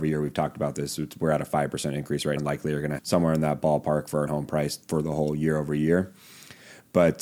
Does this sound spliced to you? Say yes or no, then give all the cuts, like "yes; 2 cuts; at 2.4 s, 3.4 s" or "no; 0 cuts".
yes; 4 cuts; at 2.4 s, 3.0 s, 4.3 s, 4.8 s